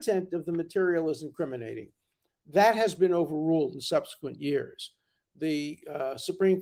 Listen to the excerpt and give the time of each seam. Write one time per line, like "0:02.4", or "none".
none

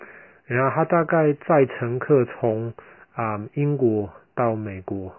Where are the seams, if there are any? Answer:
none

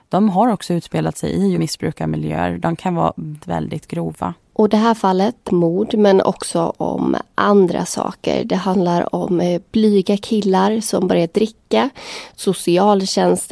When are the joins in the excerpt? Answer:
0:01.6
0:03.4
0:04.4
0:05.5

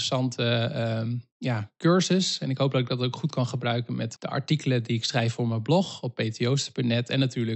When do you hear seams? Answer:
0:01.3
0:04.2

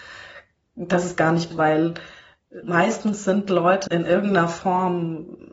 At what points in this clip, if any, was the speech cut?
0:01.1
0:01.5
0:02.6
0:03.9

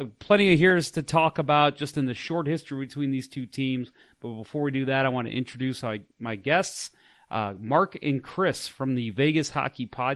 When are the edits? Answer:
none

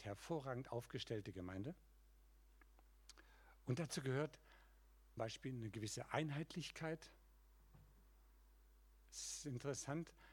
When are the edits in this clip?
0:05.2

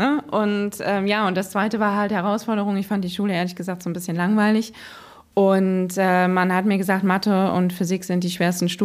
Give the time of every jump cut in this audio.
none

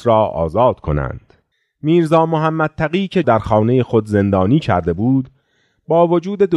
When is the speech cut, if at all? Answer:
0:01.5
0:03.2

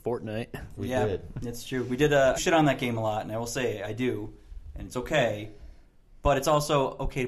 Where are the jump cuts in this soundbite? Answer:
0:02.4

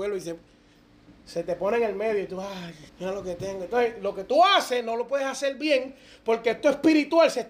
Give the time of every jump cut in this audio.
0:02.9

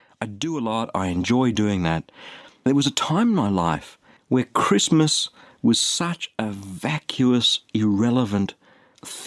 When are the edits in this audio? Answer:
none

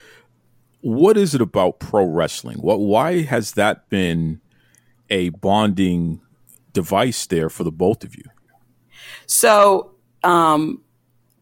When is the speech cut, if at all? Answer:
none

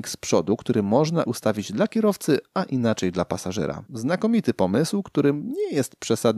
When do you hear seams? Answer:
0:01.2
0:03.9

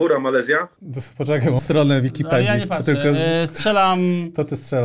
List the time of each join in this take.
0:01.6

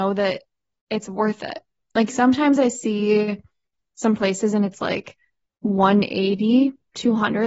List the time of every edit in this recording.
none

